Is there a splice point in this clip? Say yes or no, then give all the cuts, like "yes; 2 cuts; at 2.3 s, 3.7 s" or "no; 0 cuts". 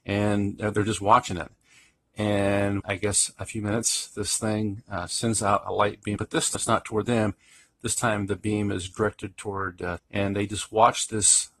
yes; 4 cuts; at 2.8 s, 6.2 s, 6.5 s, 10.0 s